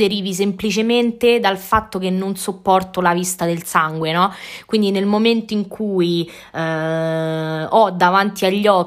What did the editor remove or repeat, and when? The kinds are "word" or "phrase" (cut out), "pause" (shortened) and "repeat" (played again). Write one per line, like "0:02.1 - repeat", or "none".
none